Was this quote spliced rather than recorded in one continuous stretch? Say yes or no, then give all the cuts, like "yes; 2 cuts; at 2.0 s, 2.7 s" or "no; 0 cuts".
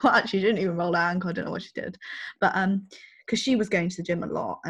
no; 0 cuts